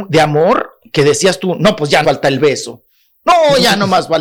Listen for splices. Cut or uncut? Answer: cut